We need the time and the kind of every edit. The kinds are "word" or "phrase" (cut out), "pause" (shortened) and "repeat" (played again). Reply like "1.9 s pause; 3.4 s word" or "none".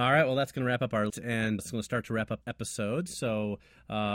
1.1 s word; 1.6 s word; 2.4 s word